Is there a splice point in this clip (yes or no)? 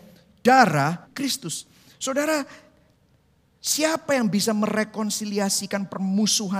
yes